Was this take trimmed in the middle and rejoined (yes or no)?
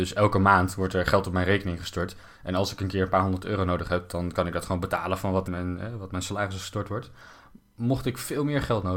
yes